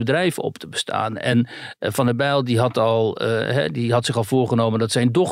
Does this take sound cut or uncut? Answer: uncut